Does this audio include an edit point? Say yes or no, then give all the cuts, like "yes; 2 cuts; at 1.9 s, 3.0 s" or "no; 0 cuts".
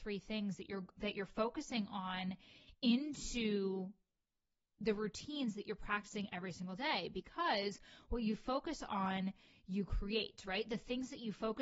no; 0 cuts